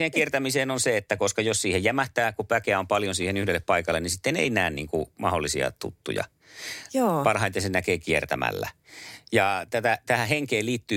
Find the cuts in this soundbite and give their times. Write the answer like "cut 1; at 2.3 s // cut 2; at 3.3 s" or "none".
none